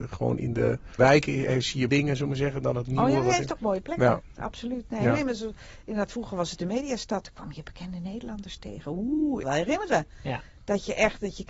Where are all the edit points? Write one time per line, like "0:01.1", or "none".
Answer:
0:01.0
0:01.9
0:03.6
0:09.4